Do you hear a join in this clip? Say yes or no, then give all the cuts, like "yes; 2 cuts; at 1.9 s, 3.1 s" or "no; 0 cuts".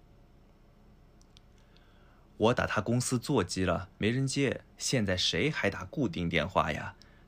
yes; 2 cuts; at 4.0 s, 4.7 s